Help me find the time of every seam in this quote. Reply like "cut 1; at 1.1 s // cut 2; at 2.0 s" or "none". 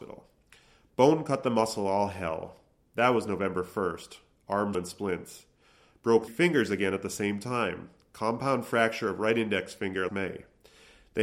cut 1; at 4.7 s // cut 2; at 6.3 s // cut 3; at 10.1 s

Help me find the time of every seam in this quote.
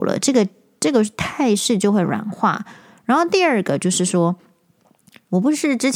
none

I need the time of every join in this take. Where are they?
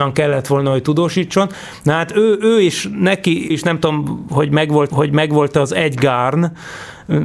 cut 1; at 3.5 s // cut 2; at 4.9 s

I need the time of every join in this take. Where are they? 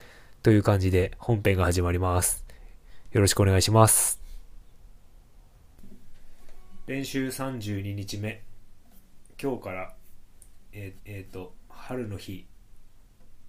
cut 1; at 11.0 s

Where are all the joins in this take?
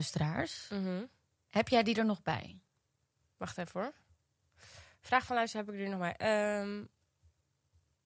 none

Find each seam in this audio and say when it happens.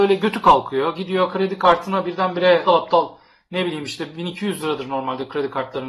cut 1; at 2.7 s

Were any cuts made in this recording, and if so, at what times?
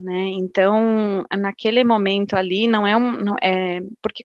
none

